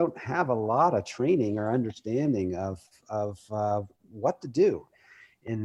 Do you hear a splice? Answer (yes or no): no